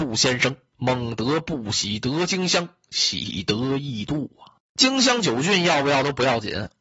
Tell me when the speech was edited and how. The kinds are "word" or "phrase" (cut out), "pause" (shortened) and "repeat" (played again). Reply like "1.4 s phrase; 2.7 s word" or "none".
none